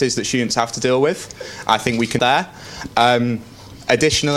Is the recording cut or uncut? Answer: cut